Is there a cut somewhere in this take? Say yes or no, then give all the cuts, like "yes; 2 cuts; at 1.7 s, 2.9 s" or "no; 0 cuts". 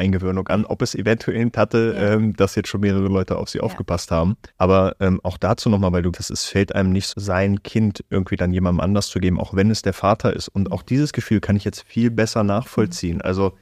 yes; 4 cuts; at 1.5 s, 4.5 s, 6.1 s, 7.1 s